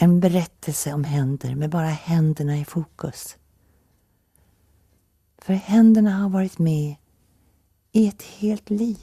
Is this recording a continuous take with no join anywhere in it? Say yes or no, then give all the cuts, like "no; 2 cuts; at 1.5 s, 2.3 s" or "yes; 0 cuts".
yes; 0 cuts